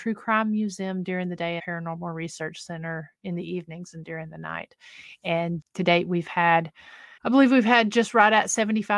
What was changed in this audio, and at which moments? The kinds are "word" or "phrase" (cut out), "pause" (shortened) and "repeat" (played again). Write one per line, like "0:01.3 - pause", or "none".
0:01.6 - phrase
0:05.6 - word
0:07.2 - pause